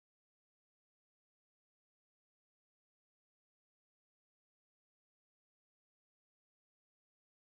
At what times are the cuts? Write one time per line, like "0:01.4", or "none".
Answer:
none